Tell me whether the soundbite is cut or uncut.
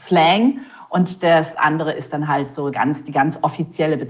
cut